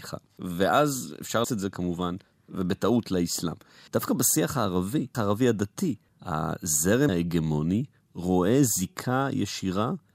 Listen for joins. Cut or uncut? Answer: cut